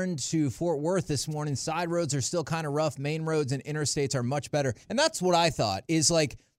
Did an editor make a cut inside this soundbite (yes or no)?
yes